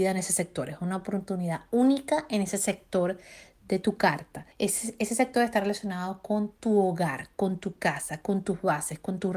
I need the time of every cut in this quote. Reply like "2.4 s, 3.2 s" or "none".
4.5 s